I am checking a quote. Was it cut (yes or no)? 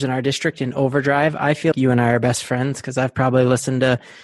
yes